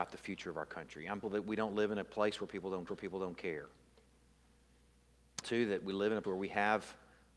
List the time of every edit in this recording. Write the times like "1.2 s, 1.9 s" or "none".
1.2 s, 2.9 s, 5.4 s, 6.2 s

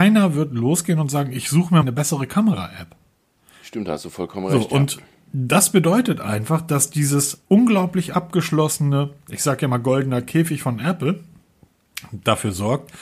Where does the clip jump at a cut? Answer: 1.8 s, 7.5 s

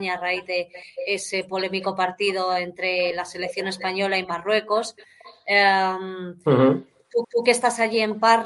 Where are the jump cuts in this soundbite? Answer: 7.2 s

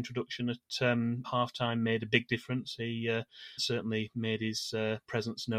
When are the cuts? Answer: 1.2 s, 3.6 s

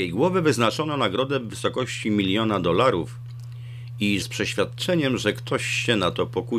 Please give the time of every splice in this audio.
4.2 s

